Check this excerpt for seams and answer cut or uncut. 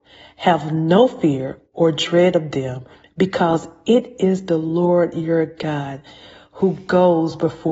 uncut